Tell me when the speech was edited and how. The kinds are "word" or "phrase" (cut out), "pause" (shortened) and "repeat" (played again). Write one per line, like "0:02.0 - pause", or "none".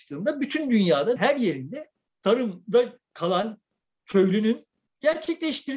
0:01.2 - word